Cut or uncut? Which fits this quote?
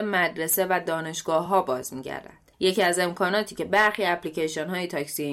uncut